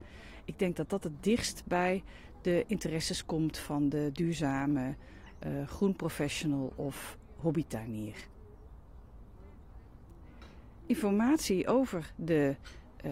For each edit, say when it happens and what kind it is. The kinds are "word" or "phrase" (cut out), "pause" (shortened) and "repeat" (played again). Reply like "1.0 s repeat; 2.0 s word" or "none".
none